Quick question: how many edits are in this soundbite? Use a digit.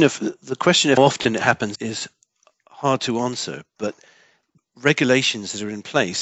3